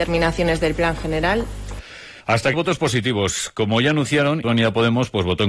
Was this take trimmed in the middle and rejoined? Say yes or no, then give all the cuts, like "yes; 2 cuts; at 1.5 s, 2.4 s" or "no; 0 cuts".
yes; 3 cuts; at 2.2 s, 2.5 s, 4.4 s